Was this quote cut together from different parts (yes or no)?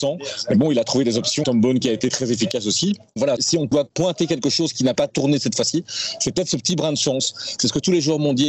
yes